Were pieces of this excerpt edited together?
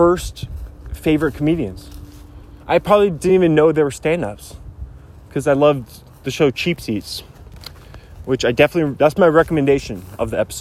no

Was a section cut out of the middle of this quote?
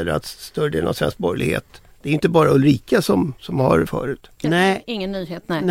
yes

